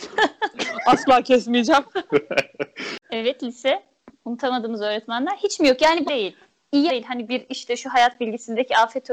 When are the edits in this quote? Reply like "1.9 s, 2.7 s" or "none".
3.0 s, 6.1 s, 6.9 s, 7.3 s